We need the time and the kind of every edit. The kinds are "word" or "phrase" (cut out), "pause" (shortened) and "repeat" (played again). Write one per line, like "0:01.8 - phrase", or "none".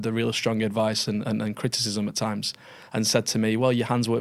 none